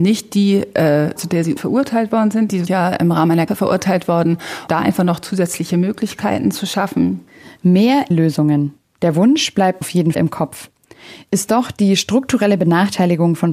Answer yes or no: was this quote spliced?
yes